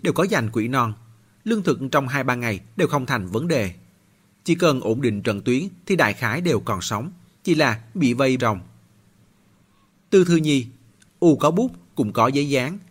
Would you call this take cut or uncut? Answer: cut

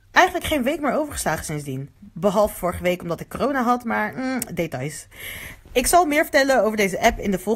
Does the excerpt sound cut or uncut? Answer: cut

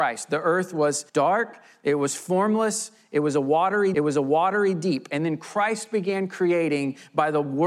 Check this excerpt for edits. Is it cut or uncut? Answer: cut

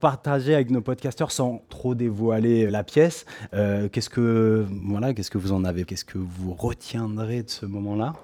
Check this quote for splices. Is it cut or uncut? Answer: cut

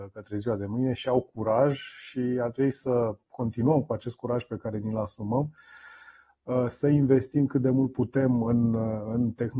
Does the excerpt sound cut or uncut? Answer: uncut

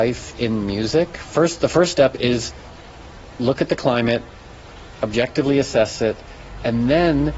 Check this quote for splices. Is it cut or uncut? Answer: uncut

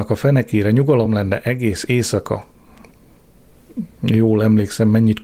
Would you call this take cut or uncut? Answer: uncut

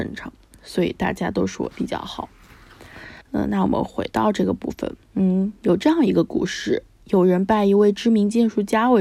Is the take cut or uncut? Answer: cut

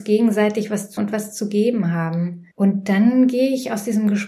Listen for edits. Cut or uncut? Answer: cut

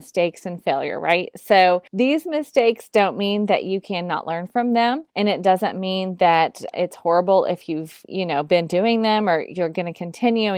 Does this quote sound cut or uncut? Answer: cut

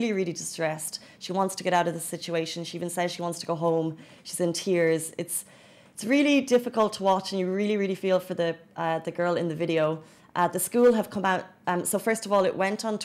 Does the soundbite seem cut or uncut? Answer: uncut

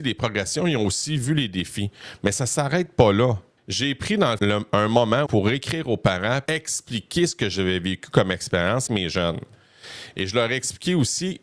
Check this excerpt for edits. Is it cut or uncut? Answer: cut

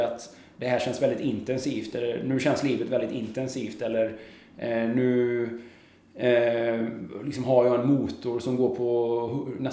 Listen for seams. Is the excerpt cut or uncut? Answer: uncut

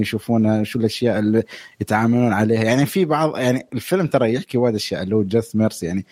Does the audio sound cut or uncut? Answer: uncut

